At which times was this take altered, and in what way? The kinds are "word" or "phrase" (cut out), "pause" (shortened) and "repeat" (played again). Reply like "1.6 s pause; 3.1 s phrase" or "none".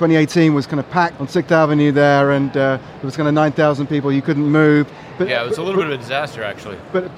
1.2 s phrase